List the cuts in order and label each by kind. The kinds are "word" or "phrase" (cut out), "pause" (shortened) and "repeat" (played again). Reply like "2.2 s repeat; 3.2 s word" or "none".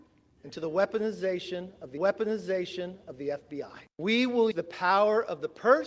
2.0 s repeat; 4.5 s word